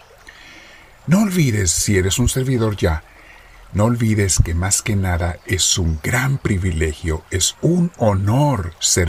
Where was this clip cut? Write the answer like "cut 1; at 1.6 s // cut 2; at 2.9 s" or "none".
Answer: none